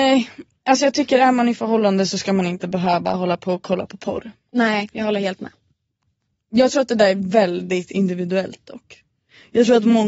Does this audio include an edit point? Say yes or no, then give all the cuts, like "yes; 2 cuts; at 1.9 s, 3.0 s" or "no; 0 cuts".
no; 0 cuts